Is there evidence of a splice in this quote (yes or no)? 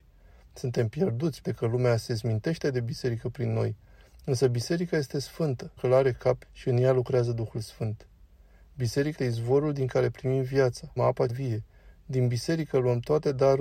yes